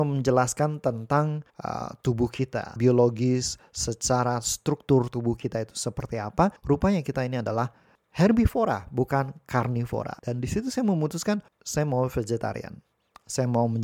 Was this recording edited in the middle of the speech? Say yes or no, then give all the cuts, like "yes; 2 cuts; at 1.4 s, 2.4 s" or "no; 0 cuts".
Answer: yes; 6 cuts; at 1.5 s, 2.8 s, 6.6 s, 8.0 s, 10.2 s, 11.5 s